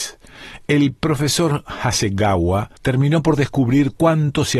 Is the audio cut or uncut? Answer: cut